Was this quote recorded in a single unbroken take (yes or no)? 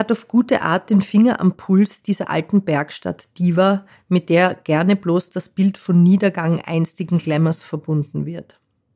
yes